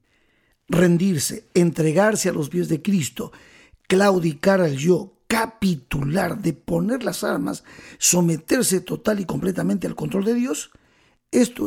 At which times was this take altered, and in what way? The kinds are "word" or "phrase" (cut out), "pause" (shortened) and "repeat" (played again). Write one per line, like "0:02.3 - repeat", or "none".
none